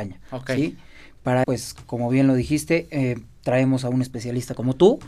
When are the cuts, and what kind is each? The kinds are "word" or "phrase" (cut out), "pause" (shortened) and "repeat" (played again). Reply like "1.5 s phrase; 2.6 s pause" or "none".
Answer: 1.4 s word